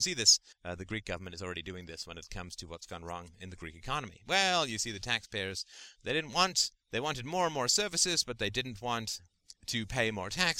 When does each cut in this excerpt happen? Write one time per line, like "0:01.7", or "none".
0:09.6